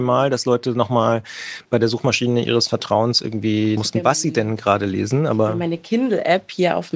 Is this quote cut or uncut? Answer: cut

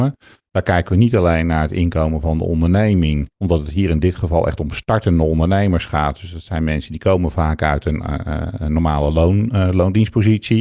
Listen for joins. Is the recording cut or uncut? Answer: cut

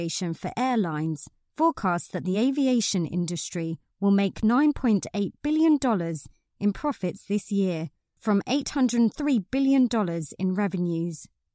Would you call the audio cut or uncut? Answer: uncut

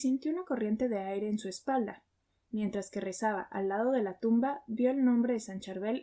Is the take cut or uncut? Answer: uncut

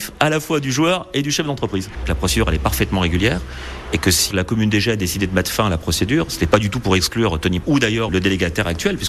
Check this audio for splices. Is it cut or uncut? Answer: cut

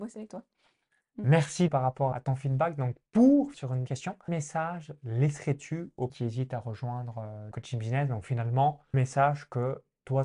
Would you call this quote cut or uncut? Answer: cut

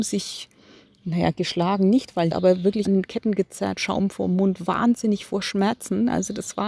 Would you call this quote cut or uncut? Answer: cut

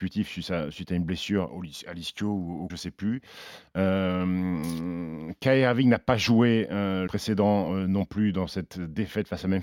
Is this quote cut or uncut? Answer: cut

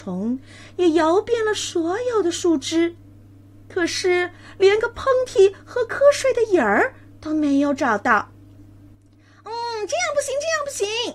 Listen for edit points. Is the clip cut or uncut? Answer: uncut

